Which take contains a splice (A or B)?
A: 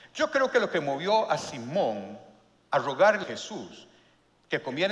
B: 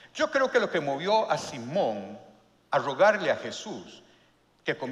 A